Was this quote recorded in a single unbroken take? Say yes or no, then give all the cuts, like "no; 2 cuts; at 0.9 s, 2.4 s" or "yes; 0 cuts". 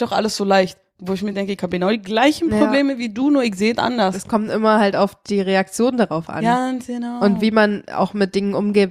yes; 0 cuts